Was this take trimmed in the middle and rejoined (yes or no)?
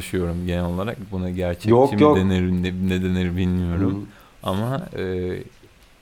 no